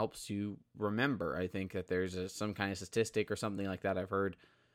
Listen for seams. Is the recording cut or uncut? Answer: uncut